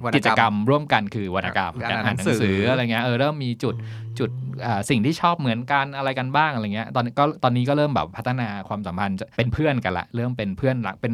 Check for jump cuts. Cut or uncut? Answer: cut